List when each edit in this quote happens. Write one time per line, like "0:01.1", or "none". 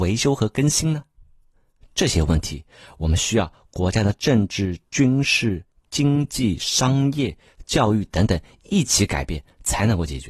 none